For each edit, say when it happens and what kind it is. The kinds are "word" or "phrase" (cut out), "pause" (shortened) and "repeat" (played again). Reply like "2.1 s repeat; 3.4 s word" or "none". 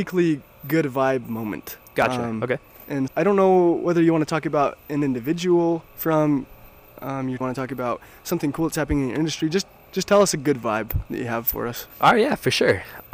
1.9 s pause; 3.1 s word; 5.9 s pause; 7.4 s phrase; 11.9 s pause